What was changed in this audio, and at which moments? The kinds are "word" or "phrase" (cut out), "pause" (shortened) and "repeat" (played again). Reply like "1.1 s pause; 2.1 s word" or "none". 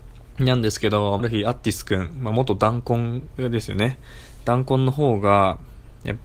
1.2 s phrase